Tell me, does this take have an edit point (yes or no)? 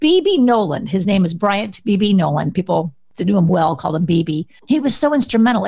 no